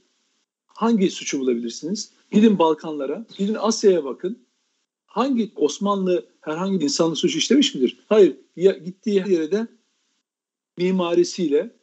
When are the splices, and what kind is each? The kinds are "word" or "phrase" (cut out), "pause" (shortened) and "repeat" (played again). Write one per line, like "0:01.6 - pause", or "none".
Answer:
0:02.2 - pause
0:03.3 - pause
0:05.6 - word
0:06.8 - word
0:08.0 - pause
0:09.2 - word